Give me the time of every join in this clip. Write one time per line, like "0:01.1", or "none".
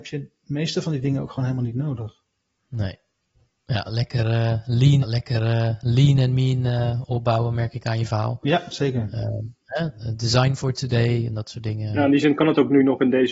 0:02.5
0:05.0

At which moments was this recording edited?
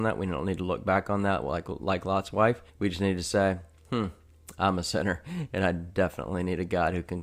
0:02.7

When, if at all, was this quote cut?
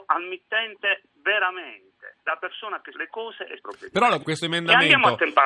0:02.2
0:02.9
0:03.6
0:04.2

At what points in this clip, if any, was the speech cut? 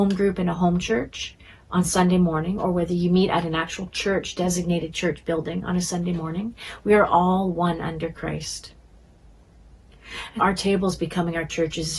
0:10.4

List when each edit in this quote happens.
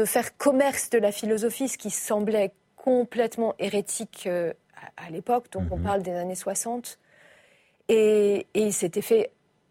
none

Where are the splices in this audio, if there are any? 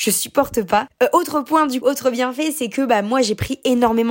0:01.8

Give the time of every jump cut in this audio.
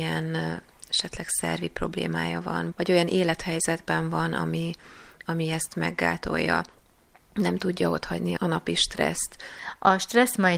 0:02.7
0:08.4

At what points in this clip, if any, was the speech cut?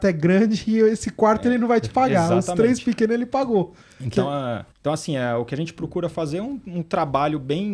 0:04.7

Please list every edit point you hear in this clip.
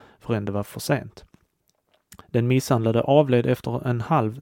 0:02.2

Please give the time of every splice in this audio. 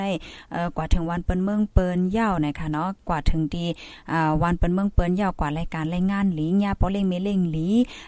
0:03.0

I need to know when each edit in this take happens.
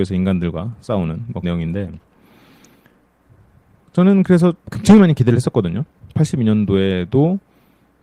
0:01.4
0:04.6

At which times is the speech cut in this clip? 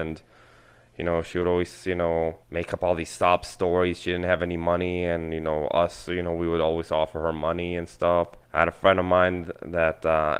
0:02.4
0:08.4

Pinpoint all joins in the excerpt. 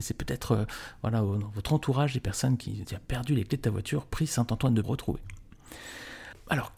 0:02.8
0:04.8

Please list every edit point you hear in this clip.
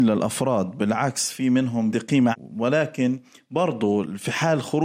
0:01.9
0:02.3

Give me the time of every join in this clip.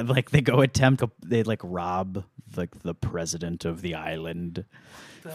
0:01.0

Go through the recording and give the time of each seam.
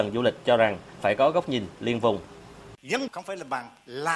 0:01.0
0:03.1

